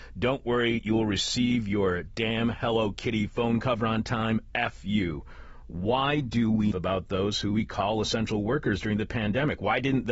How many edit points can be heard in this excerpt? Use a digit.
1